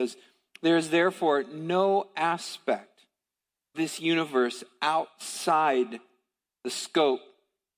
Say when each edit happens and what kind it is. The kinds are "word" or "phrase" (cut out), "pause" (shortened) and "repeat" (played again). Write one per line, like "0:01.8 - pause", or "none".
0:03.7 - word